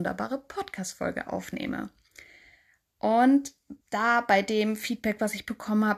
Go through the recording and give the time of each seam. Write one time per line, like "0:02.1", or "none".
0:03.8